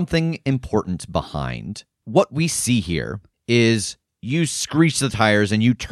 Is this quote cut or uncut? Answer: uncut